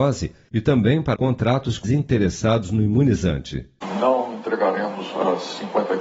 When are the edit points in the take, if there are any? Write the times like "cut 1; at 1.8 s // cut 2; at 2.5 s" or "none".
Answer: cut 1; at 1.1 s // cut 2; at 1.8 s